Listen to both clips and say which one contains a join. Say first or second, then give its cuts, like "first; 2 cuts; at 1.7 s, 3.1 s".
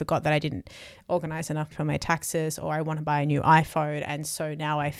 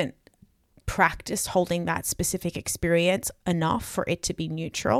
first; 1 cut; at 1.7 s